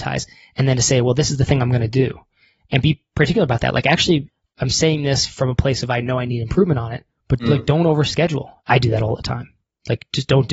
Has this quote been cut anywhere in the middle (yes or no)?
no